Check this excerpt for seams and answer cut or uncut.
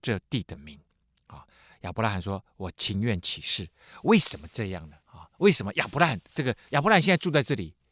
cut